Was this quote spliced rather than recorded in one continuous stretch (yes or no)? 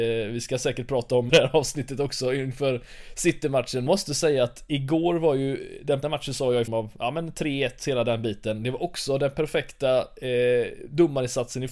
yes